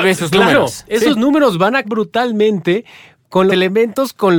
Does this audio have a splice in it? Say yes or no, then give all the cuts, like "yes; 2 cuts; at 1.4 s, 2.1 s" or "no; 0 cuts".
yes; 2 cuts; at 1.8 s, 3.5 s